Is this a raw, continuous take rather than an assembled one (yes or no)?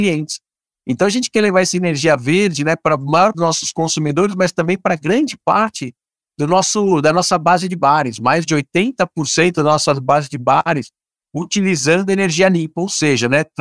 no